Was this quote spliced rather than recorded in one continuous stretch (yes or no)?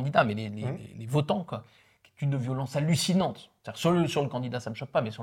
no